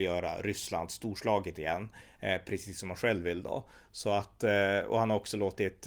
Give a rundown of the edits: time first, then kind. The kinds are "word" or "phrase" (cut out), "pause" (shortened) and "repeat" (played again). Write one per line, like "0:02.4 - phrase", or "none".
none